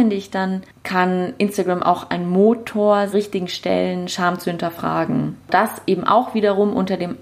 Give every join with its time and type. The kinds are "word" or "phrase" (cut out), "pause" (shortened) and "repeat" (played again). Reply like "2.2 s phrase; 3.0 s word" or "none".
3.1 s phrase

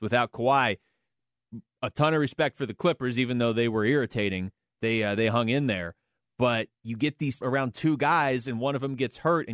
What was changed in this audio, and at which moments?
7.4 s phrase

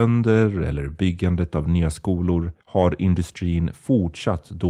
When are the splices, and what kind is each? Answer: 2.6 s pause

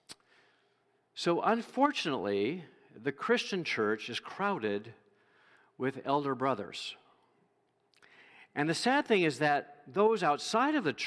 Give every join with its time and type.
none

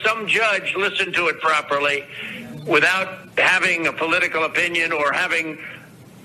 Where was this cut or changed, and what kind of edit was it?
3.3 s pause

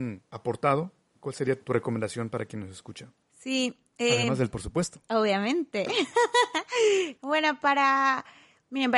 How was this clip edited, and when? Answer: 4.5 s word; 7.2 s word

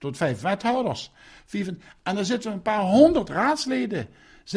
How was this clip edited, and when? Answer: none

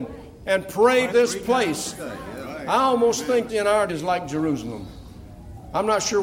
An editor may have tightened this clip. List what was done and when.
1.1 s word; 3.5 s word; 3.9 s word

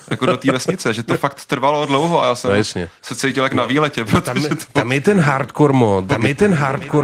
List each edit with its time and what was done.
none

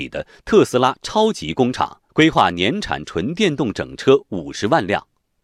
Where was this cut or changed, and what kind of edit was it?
2.1 s pause

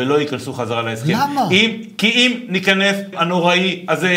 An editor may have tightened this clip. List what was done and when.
3.1 s word

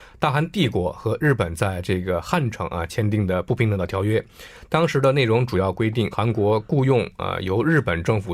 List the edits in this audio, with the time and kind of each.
6.1 s word

